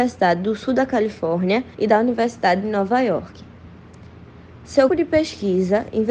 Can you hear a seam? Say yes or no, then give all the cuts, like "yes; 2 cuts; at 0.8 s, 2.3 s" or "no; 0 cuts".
yes; 2 cuts; at 1.7 s, 4.9 s